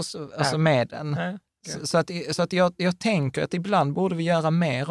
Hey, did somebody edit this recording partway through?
no; 0 cuts

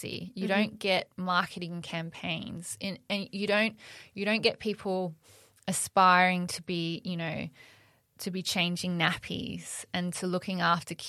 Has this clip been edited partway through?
no; 0 cuts

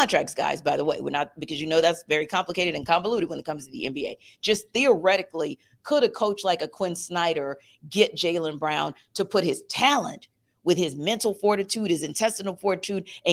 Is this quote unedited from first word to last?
yes; 0 cuts

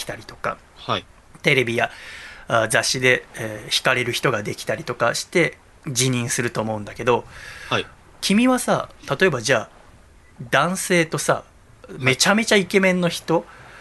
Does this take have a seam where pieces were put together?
yes; 1 cut; at 3.3 s

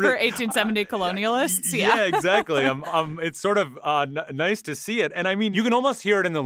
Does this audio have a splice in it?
yes; 1 cut; at 2.9 s

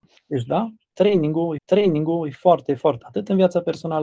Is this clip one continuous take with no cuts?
no; 2 cuts; at 1.6 s, 3.0 s

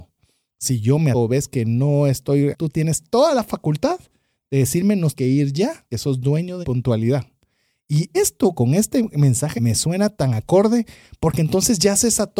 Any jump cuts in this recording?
yes; 8 cuts; at 1.1 s, 2.5 s, 5.1 s, 5.9 s, 6.6 s, 8.1 s, 8.5 s, 9.6 s

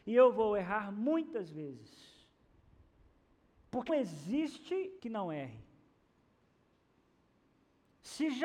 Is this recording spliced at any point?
yes; 2 cuts; at 3.9 s, 5.0 s

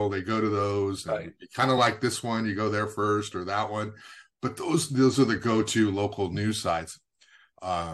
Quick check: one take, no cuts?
yes; 0 cuts

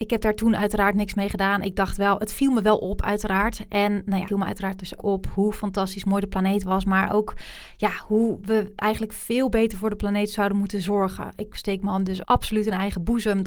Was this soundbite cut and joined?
yes; 3 cuts; at 4.3 s, 5.0 s, 12.2 s

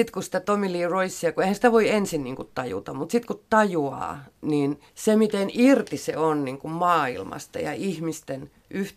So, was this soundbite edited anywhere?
yes; 1 cut; at 4.9 s

